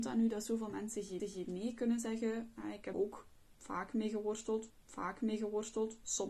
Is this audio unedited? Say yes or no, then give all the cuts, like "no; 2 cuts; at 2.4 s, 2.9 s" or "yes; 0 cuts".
no; 3 cuts; at 1.2 s, 2.9 s, 4.7 s